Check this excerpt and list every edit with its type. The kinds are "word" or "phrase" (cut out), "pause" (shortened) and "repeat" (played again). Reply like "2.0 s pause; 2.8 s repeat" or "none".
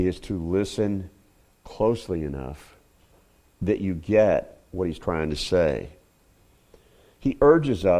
none